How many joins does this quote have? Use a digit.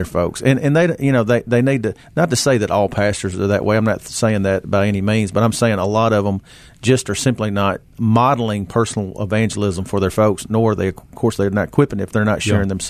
0